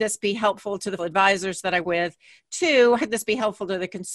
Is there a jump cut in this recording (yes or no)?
yes